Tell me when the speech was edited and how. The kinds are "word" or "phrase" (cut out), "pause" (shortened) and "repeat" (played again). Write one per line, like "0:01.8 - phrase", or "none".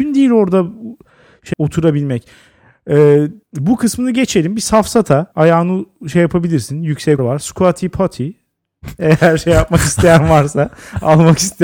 0:01.5 - word
0:03.4 - pause
0:05.3 - word
0:07.2 - phrase

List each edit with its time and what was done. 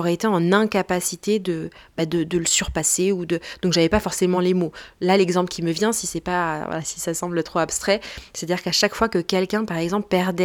none

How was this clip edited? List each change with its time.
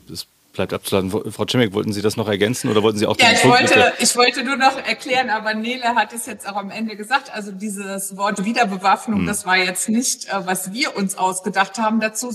none

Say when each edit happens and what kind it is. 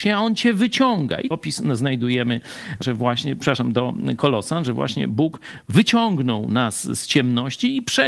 0:01.3 - word
0:02.8 - phrase

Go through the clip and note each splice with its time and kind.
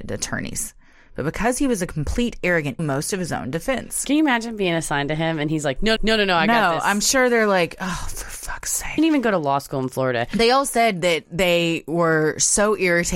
0:02.8 - phrase
0:06.0 - repeat
0:09.0 - word

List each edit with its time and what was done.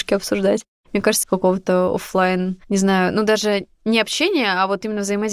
0:01.2 - phrase
0:02.6 - pause

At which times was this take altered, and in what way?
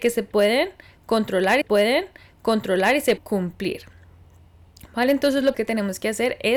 0:01.6 - repeat
0:03.2 - word
0:05.5 - word

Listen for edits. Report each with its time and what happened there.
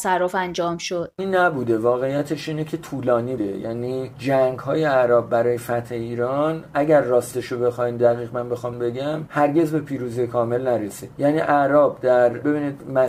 0:01.2 - word
0:03.4 - word
0:08.7 - word

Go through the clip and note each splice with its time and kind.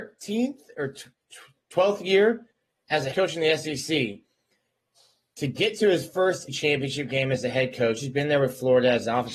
0:03.1 - word
0:06.5 - word

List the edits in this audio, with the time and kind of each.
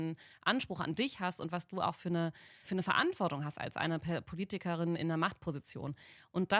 0:02.6 - word
0:05.0 - word

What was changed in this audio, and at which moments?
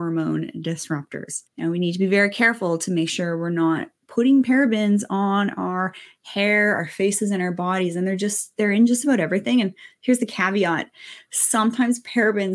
0:01.5 - pause

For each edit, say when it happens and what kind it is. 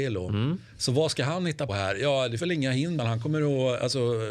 0:01.7 - word
0:02.4 - word
0:03.0 - word

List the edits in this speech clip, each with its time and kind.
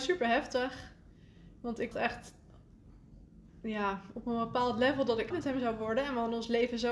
0:01.9 - word
0:05.3 - word

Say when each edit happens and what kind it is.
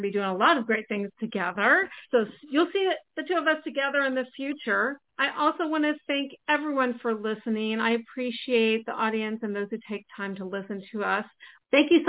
0:02.0 - pause
0:05.1 - pause
0:06.4 - pause

